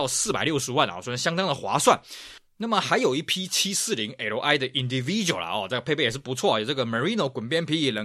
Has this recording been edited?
no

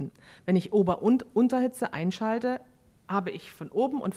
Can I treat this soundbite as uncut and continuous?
yes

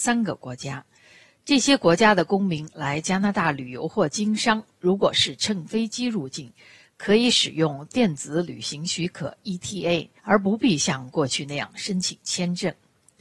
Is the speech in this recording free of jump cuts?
no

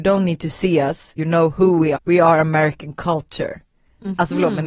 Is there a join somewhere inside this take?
yes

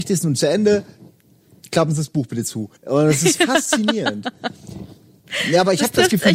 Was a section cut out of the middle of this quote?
yes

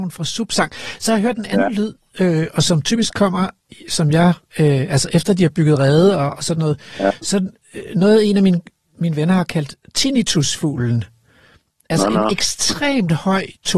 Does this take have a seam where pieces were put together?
no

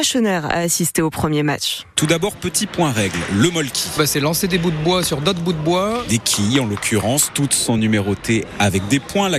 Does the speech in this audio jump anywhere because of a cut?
no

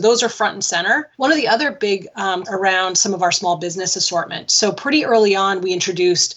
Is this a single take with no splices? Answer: no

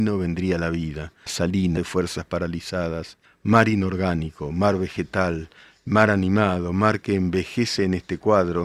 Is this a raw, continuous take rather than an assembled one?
no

